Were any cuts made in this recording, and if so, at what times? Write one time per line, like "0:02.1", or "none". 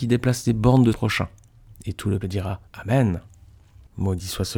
0:00.9
0:02.2
0:02.7